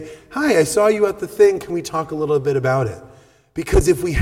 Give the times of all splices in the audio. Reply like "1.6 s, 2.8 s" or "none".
none